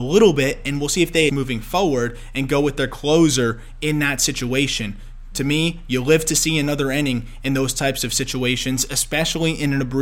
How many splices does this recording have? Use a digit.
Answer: 1